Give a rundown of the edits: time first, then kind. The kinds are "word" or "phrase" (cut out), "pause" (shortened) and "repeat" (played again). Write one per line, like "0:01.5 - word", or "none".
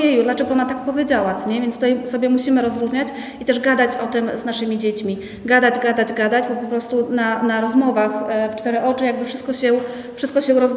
none